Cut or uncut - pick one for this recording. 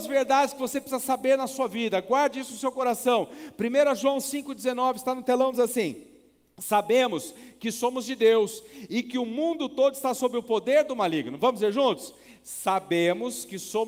uncut